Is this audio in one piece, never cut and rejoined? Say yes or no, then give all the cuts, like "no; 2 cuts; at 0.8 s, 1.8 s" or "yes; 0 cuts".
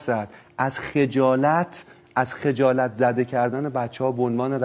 yes; 0 cuts